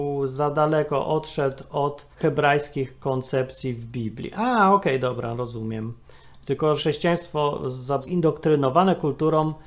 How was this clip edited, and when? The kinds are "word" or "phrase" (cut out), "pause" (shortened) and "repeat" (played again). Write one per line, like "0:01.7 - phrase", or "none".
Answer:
0:02.1 - pause
0:06.8 - word
0:08.0 - phrase